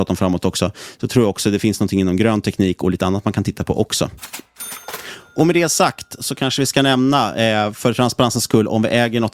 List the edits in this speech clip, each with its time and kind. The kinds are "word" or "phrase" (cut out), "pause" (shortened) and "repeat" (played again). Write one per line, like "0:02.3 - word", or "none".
none